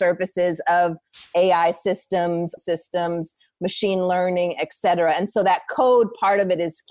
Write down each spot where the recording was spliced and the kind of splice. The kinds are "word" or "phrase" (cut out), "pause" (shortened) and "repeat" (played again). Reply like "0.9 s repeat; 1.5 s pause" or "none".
2.6 s phrase